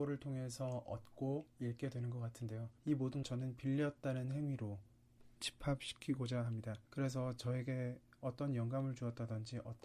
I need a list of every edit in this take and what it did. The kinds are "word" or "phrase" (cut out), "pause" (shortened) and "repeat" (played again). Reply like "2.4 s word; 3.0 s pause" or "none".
1.5 s pause; 2.8 s pause; 3.2 s word; 5.4 s word; 6.9 s pause